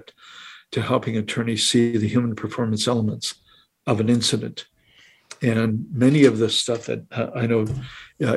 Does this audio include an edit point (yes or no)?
no